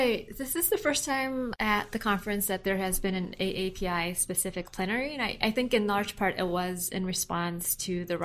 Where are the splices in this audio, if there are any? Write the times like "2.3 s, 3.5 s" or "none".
none